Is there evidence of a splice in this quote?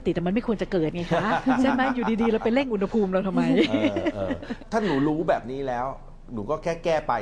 no; 0 cuts

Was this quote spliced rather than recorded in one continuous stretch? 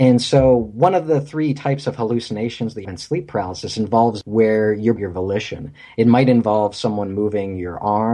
yes; 3 cuts; at 2.8 s, 4.2 s, 5.0 s

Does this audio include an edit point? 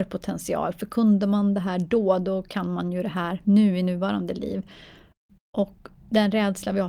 yes; 1 cut; at 6.0 s

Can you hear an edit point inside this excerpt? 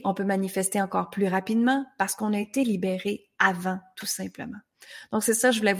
no; 0 cuts

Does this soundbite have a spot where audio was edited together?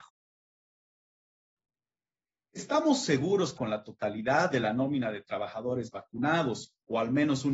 yes; 1 cut; at 3.6 s

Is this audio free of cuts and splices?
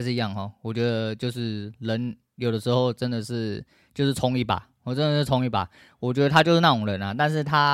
yes; 0 cuts

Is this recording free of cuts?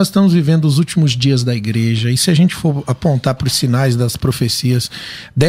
yes; 0 cuts

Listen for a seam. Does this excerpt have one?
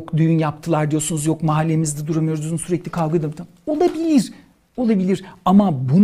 no; 0 cuts

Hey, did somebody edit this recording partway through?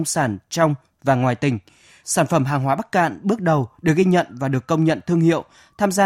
no; 0 cuts

